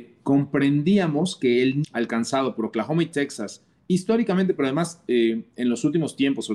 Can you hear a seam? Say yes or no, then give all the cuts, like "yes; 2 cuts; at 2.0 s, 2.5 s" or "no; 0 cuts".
yes; 1 cut; at 1.8 s